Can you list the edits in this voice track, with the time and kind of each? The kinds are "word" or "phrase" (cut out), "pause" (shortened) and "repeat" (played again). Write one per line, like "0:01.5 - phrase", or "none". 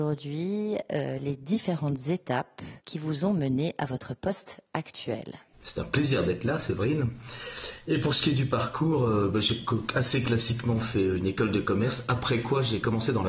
0:02.8 - pause